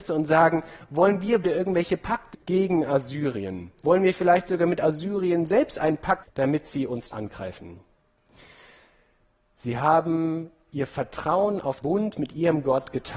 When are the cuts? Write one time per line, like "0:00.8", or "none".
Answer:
0:01.4
0:02.3
0:06.2
0:07.1
0:11.8